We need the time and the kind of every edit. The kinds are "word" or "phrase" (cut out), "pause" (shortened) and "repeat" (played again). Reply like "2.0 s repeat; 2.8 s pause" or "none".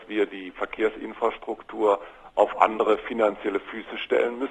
none